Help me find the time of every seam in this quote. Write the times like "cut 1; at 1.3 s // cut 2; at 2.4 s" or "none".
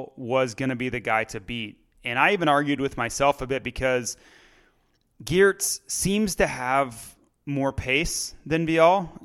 none